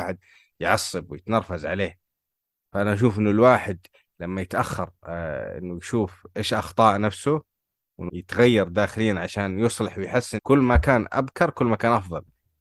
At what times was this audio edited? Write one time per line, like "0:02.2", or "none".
0:08.1
0:10.4